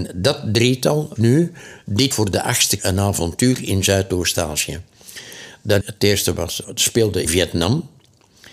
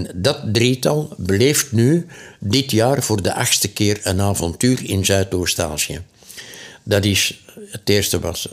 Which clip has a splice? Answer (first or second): first